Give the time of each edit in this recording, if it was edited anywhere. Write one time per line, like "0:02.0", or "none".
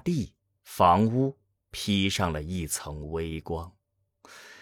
none